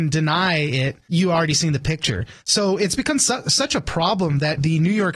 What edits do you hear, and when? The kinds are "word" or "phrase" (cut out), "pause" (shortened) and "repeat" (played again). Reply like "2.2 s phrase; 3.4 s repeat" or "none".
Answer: 2.4 s pause